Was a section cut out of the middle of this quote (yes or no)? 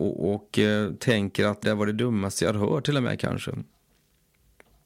yes